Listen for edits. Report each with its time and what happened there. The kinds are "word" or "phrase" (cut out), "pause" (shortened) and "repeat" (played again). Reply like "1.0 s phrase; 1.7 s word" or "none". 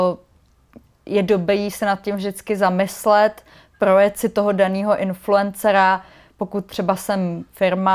none